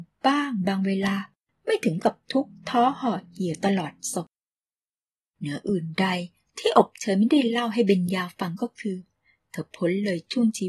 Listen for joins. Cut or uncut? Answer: uncut